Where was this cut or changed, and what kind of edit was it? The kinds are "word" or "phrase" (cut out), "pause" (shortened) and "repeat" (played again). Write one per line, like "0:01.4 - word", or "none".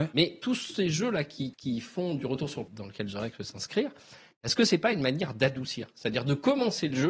0:01.5 - word
0:02.7 - word

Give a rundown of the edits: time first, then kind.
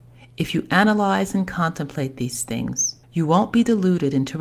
0:03.0 - pause

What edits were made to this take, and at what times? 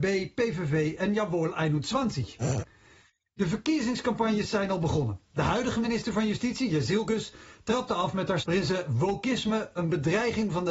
0:05.2 - pause
0:08.4 - word

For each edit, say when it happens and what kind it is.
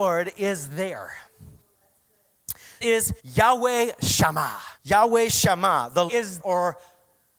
0:02.8 - word
0:03.2 - pause
0:04.8 - pause
0:06.1 - word
0:06.4 - word

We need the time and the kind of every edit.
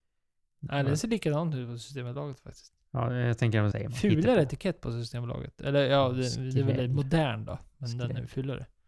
0:03.7 - phrase

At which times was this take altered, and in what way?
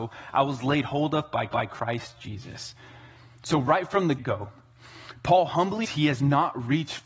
0:01.5 - repeat
0:04.2 - word
0:05.8 - word

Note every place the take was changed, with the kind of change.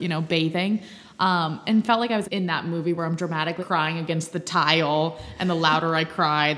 0:02.2 - word
0:03.6 - word

